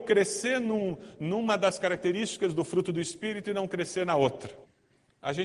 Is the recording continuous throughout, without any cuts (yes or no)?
yes